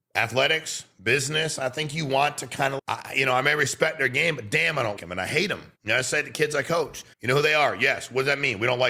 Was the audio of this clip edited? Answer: yes; 4 cuts; at 2.8 s, 5.0 s, 5.8 s, 7.1 s

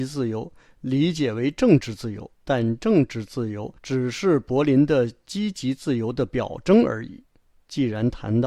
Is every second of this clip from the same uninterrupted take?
no; 3 cuts; at 2.3 s, 3.8 s, 7.4 s

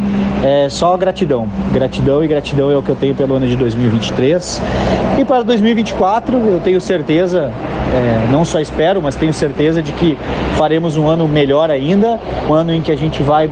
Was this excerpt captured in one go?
no; 1 cut; at 12.5 s

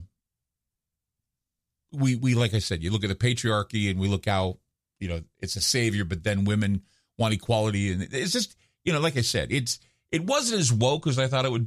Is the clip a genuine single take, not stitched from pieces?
yes; 0 cuts

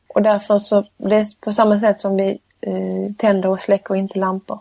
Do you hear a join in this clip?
no; 0 cuts

